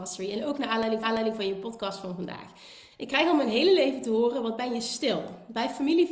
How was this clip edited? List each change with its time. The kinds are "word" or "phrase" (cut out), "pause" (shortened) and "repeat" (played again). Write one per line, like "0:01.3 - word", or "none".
0:01.0 - repeat